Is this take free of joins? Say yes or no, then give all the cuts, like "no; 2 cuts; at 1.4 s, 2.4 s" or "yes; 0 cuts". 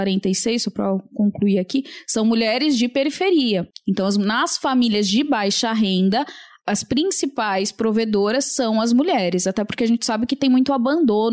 yes; 0 cuts